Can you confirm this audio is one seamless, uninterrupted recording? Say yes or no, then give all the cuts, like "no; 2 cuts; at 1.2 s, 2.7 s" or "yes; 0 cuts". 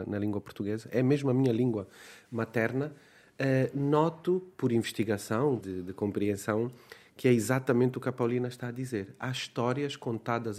no; 1 cut; at 5.6 s